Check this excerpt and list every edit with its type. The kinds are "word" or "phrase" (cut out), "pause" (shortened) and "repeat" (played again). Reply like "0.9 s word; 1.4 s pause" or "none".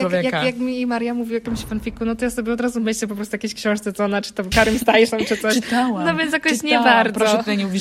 4.5 s word